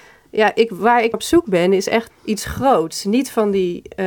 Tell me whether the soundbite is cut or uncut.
cut